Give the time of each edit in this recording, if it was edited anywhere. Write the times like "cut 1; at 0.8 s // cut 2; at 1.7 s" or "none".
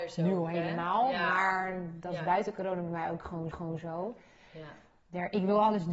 cut 1; at 3.5 s